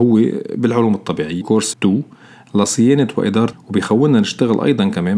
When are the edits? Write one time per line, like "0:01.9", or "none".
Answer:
0:01.4
0:01.7
0:03.5